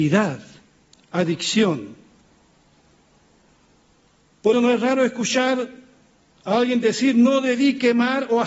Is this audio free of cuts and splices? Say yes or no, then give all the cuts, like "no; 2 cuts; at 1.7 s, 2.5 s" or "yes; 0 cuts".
no; 1 cut; at 4.5 s